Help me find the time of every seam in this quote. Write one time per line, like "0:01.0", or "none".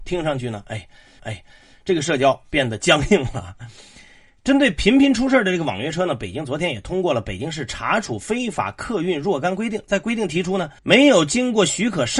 0:01.2
0:10.8